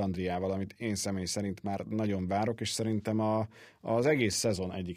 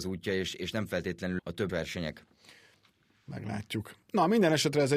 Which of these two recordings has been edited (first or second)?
second